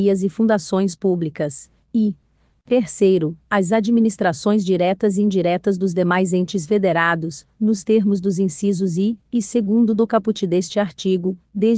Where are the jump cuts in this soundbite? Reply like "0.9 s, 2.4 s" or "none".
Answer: none